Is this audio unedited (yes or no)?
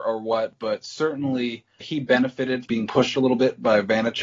no